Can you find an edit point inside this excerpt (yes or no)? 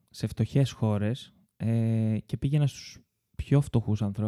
no